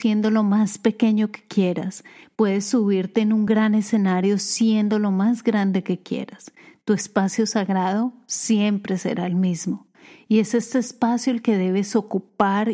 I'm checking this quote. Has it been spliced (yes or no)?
no